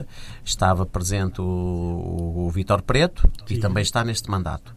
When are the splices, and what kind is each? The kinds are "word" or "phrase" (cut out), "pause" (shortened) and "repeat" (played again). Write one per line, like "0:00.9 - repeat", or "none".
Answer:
none